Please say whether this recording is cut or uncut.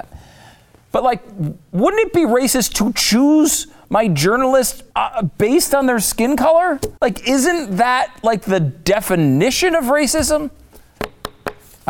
cut